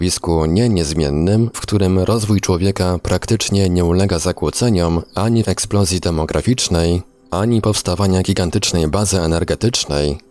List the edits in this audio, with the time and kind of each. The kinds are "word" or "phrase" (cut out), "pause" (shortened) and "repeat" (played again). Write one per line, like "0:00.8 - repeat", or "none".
0:01.5 - word
0:05.4 - word